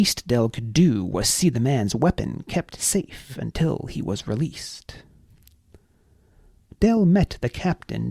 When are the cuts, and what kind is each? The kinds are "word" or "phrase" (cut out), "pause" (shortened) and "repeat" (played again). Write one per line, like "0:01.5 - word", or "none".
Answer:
none